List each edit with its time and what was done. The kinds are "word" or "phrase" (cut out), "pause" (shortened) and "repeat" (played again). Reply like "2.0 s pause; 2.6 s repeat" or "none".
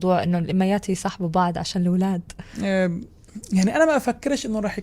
none